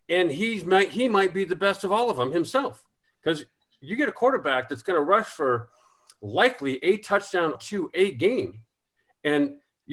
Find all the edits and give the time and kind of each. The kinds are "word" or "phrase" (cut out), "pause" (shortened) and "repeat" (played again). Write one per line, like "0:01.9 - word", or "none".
0:07.5 - word